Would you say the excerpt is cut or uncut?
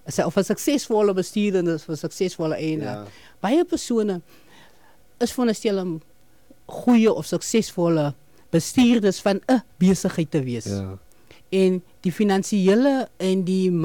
uncut